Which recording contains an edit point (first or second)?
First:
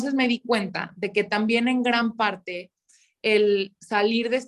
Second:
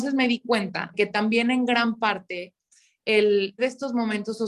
second